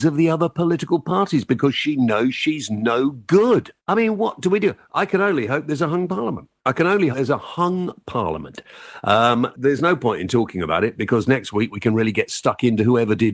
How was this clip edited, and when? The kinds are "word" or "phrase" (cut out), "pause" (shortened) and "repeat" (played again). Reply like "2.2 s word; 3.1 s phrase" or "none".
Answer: 3.8 s pause; 6.6 s pause; 7.1 s word; 9.5 s word

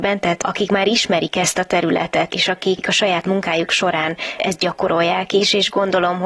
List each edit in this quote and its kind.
2.3 s word

